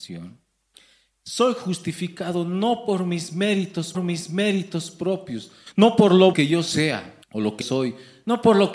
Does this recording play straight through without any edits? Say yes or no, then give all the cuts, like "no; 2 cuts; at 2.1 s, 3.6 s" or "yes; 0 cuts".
no; 4 cuts; at 3.9 s, 6.3 s, 7.2 s, 7.6 s